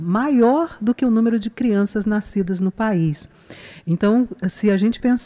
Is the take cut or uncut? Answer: uncut